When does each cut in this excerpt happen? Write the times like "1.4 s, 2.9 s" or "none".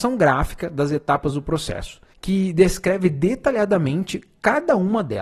2.1 s